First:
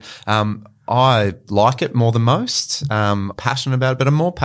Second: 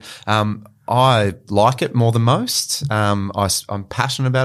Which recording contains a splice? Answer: first; 1 cut; at 3.3 s

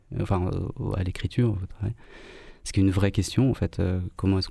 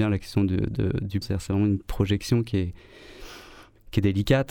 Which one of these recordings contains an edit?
second; 1 cut; at 1.2 s

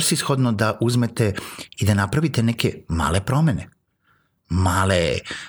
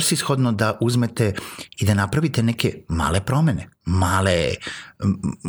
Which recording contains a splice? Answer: second; 1 cut; at 3.8 s

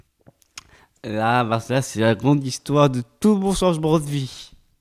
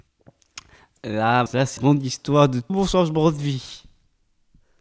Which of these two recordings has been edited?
second; 3 cuts; at 1.5 s, 1.8 s, 2.7 s

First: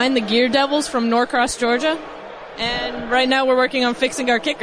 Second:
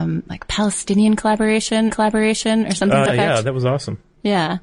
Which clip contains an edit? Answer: second; 2 cuts; at 1.9 s, 3.1 s

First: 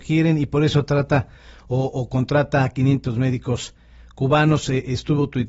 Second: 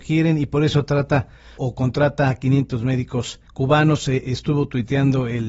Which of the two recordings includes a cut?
second; 2 cuts; at 1.6 s, 3.5 s

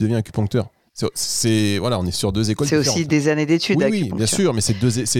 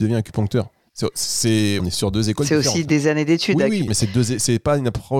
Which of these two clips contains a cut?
second; 2 cuts; at 1.8 s, 3.9 s

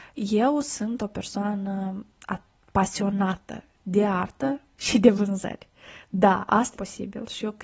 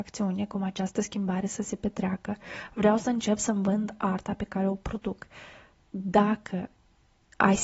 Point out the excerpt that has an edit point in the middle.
first; 1 cut; at 6.7 s

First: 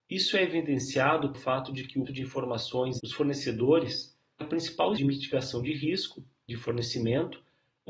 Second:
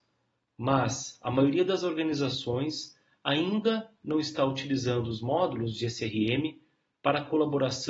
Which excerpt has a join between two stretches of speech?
first; 5 cuts; at 1.3 s, 2.1 s, 3.0 s, 4.4 s, 5.0 s

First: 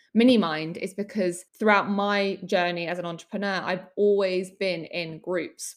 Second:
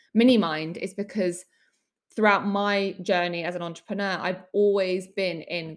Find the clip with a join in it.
first; 1 cut; at 1.5 s

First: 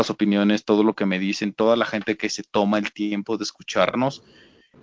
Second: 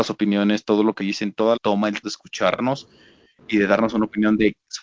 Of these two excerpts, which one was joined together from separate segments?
second; 3 cuts; at 1.0 s, 1.6 s, 2.0 s

